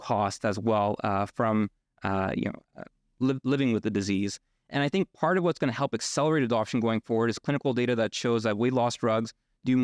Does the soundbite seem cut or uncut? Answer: uncut